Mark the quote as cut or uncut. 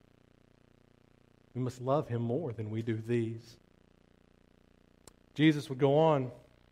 uncut